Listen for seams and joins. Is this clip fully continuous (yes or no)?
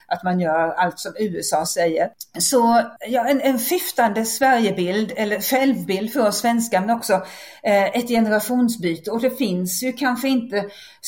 no